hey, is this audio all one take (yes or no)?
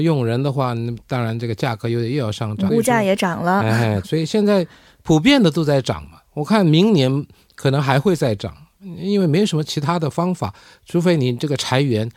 no